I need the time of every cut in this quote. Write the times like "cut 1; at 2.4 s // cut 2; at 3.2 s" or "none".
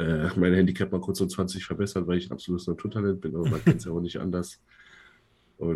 none